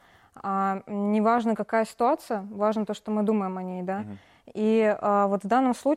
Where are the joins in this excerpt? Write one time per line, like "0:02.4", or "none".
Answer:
none